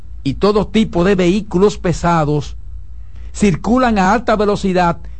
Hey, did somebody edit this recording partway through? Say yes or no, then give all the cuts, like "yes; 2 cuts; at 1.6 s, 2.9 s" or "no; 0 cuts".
no; 0 cuts